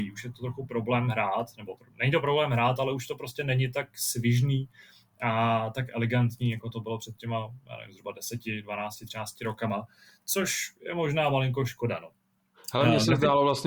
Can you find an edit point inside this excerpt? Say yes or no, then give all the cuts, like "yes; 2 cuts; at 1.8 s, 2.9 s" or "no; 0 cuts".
no; 0 cuts